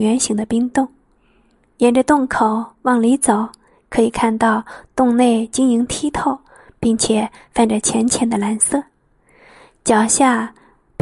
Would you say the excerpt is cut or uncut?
uncut